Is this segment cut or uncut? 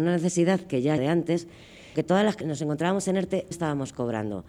cut